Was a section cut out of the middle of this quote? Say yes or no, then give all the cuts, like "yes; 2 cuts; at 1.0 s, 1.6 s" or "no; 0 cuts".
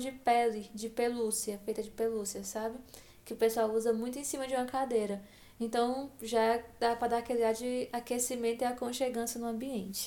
no; 0 cuts